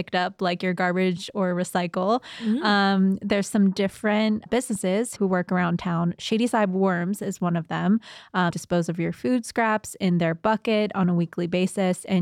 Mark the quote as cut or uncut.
cut